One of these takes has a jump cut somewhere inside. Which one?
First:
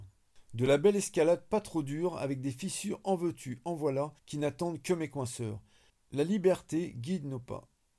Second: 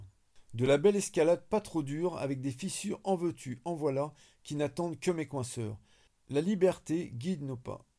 first; 1 cut; at 4.2 s

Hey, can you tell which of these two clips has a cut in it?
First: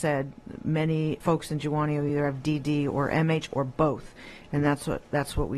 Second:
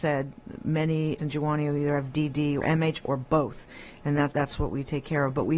second; 3 cuts; at 1.2 s, 2.6 s, 4.3 s

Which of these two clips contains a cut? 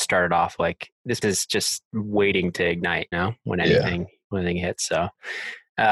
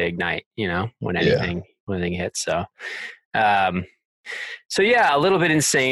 first; 2 cuts; at 1.2 s, 3.1 s

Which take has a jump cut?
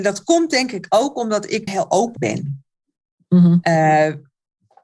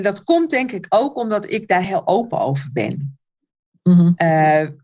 first; 2 cuts; at 1.7 s, 2.2 s

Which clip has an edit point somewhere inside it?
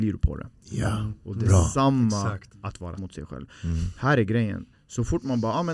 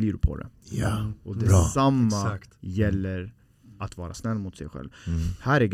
first; 2 cuts; at 2.5 s, 3.0 s

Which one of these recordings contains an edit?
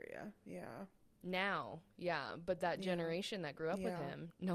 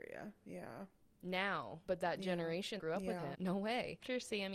second; 3 cuts; at 1.9 s, 2.8 s, 3.3 s

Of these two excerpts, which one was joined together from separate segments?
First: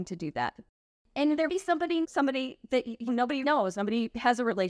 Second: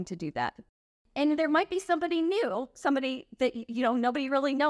first; 4 cuts; at 1.5 s, 2.0 s, 3.1 s, 3.4 s

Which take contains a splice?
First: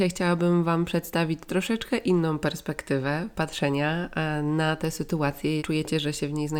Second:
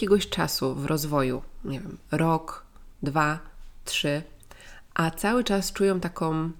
first; 1 cut; at 5.6 s

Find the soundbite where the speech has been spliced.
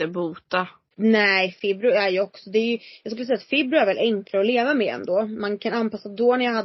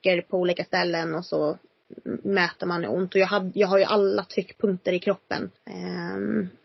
second; 1 cut; at 5.6 s

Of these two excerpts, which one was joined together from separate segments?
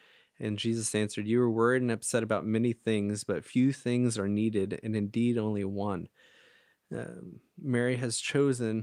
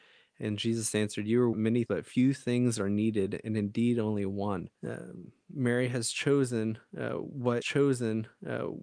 second; 4 cuts; at 1.5 s, 1.9 s, 4.8 s, 7.6 s

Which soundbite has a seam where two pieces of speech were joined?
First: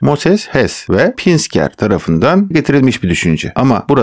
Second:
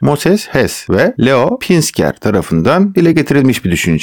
first; 2 cuts; at 1.1 s, 2.5 s

